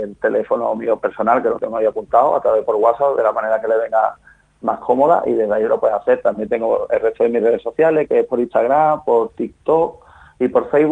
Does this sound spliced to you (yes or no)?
no